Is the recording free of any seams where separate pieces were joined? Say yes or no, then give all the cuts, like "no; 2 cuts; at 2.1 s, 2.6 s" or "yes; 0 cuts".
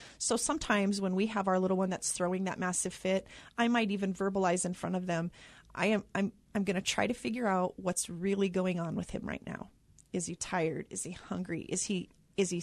yes; 0 cuts